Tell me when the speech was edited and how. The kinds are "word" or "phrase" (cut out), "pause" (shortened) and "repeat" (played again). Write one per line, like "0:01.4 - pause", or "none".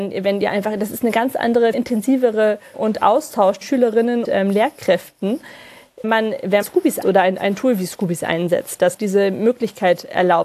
0:01.7 - word
0:02.7 - word
0:03.6 - word
0:04.2 - word
0:06.0 - word
0:06.6 - word
0:07.0 - word
0:08.9 - word